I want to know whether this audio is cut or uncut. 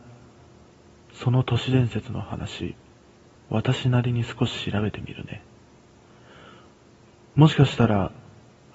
uncut